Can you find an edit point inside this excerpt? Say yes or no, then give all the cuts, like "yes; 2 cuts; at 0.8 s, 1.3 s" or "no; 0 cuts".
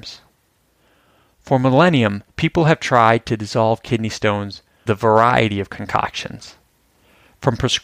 yes; 2 cuts; at 2.3 s, 4.9 s